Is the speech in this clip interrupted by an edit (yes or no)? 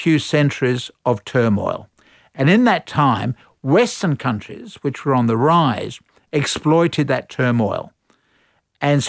no